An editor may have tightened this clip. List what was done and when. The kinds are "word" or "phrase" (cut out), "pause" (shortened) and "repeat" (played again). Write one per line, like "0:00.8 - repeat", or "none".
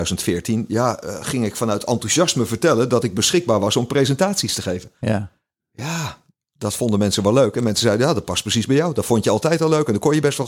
none